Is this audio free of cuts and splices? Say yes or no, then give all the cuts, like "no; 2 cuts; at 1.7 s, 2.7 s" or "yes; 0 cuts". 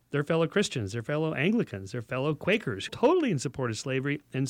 no; 1 cut; at 2.9 s